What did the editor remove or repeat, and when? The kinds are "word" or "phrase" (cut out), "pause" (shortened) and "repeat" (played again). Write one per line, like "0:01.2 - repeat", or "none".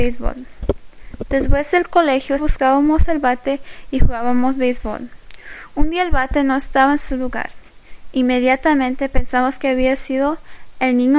0:02.4 - word